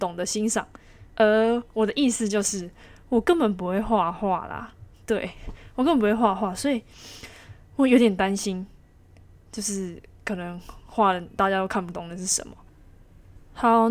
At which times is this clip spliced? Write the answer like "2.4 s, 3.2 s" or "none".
1.1 s